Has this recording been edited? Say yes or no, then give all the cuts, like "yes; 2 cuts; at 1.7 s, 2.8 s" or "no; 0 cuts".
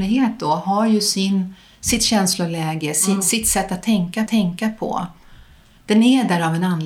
yes; 1 cut; at 4.3 s